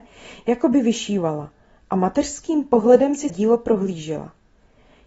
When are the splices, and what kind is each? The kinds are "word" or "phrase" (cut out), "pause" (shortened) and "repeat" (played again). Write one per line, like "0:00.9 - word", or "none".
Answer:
0:03.3 - word

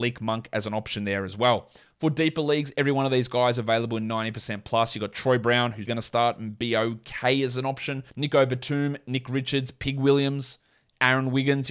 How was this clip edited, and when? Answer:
0:05.9 - word
0:08.1 - pause

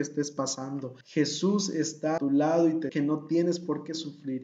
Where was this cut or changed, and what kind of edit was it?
0:01.0 - pause
0:02.2 - word
0:02.9 - word

